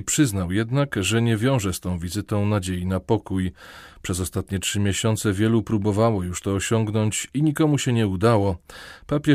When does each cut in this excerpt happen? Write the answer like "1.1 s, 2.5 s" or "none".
none